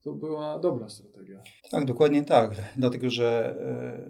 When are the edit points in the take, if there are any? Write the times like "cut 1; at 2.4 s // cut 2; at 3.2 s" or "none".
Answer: cut 1; at 1.6 s